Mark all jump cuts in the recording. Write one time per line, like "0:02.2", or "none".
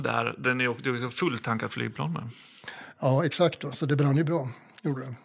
none